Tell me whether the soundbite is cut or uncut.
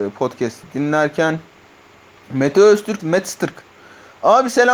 cut